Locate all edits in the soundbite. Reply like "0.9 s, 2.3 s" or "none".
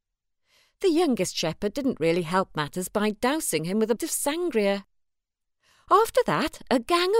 4.0 s